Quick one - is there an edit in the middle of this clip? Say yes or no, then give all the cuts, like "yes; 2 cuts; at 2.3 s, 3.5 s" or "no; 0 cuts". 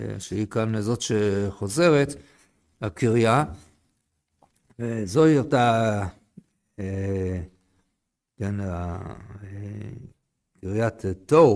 no; 0 cuts